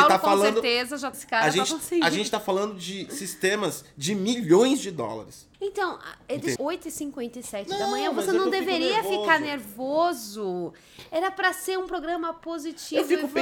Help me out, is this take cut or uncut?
cut